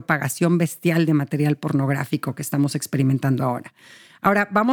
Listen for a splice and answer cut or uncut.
uncut